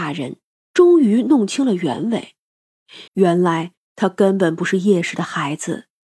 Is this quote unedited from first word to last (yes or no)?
no